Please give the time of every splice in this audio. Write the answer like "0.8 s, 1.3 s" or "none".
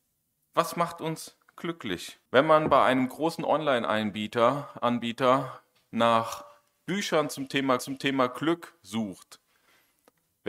2.3 s, 7.8 s